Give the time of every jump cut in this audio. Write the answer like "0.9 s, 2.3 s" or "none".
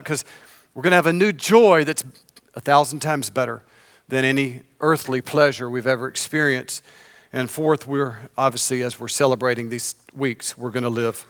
none